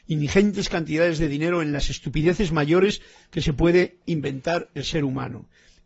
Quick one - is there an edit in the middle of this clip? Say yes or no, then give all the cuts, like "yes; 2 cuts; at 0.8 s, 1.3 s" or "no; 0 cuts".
no; 0 cuts